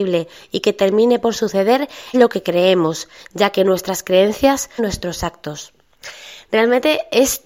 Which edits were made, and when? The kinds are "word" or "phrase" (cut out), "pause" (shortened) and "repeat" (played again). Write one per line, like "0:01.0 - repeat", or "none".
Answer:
0:02.1 - word
0:04.8 - word